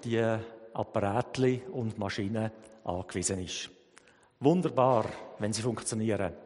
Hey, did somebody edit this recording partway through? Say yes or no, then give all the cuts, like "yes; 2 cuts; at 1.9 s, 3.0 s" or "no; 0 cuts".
no; 0 cuts